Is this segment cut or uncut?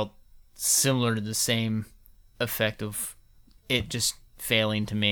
uncut